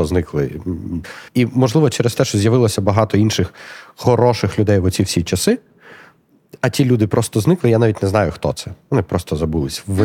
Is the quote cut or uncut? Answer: cut